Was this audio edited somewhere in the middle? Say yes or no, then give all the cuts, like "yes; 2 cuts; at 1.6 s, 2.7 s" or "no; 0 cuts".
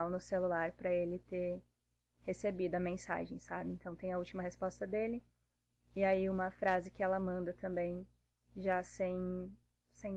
no; 0 cuts